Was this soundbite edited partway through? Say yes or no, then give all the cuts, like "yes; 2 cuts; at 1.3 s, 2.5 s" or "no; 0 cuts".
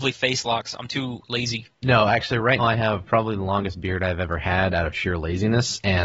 yes; 1 cut; at 2.6 s